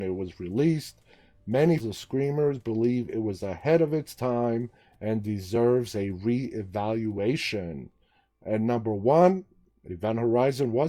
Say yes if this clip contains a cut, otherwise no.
yes